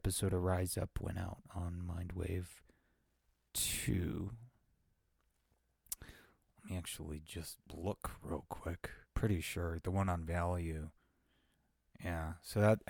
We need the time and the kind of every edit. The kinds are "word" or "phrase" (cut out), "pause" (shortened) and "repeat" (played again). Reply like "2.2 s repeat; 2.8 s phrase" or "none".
7.6 s pause; 9.0 s pause

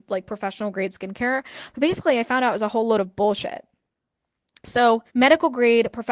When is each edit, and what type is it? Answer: 5.1 s pause

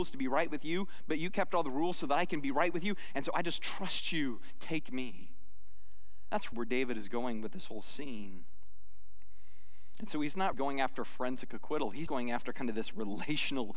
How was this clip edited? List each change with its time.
6.5 s word; 10.5 s word; 12.1 s word

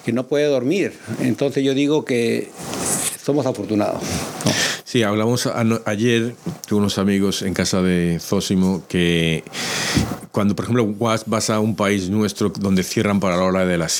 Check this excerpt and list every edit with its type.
none

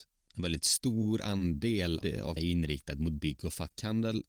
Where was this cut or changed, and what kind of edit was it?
2.0 s word; 2.4 s word

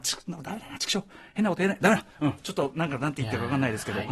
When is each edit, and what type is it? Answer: 2.1 s pause

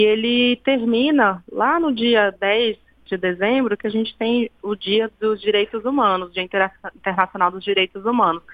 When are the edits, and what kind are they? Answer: none

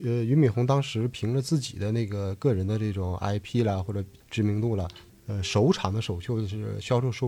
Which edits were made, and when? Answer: none

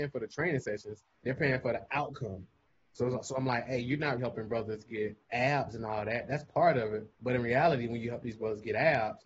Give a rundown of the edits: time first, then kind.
1.1 s pause; 4.2 s word; 5.2 s pause; 7.1 s pause

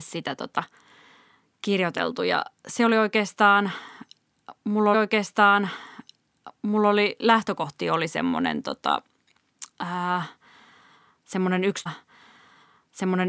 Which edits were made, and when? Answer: 2.6 s pause; 4.9 s repeat; 9.7 s pause; 11.9 s repeat

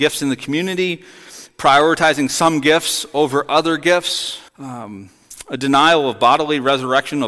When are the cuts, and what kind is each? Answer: 4.5 s pause

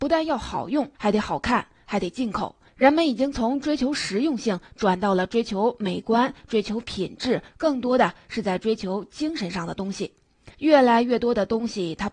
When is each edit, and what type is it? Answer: 0.9 s pause; 7.5 s phrase; 10.5 s pause

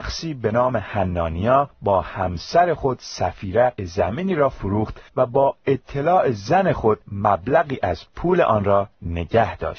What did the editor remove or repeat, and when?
1.7 s pause; 3.8 s word; 5.1 s pause; 7.0 s pause

